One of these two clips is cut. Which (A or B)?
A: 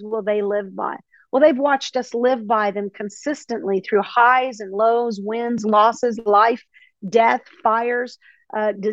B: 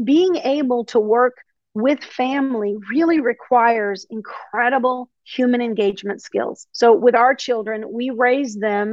B